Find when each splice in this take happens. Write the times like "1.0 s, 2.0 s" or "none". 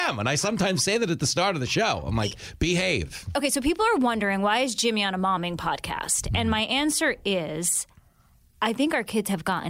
none